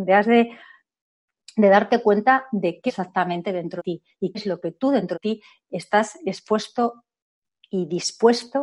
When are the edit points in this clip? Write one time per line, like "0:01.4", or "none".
0:02.9
0:03.8
0:04.3
0:05.1